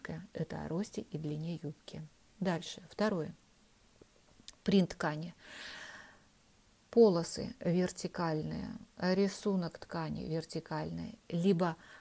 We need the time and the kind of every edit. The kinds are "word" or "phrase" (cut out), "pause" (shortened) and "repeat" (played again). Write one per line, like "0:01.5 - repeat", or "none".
none